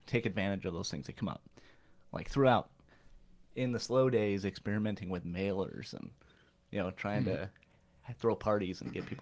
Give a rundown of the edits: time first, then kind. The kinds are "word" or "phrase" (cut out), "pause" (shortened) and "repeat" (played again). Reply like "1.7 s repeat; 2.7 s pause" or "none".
none